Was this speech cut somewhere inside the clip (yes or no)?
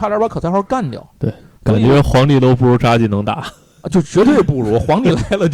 no